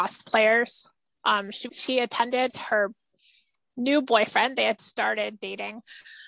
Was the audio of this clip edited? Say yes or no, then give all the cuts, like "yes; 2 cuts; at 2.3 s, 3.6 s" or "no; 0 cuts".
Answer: yes; 3 cuts; at 1.7 s, 2.5 s, 4.8 s